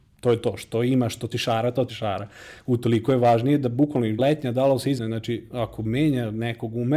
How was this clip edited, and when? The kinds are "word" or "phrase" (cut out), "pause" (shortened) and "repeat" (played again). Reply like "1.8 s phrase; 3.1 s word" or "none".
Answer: 1.3 s word; 1.9 s word; 4.2 s word; 5.0 s word